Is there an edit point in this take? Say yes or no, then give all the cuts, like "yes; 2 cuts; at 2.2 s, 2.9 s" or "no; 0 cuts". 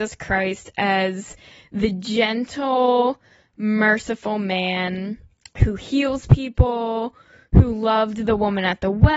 no; 0 cuts